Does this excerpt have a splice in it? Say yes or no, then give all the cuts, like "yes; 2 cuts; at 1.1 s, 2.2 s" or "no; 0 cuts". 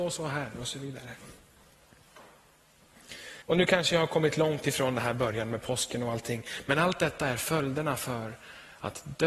yes; 1 cut; at 3.4 s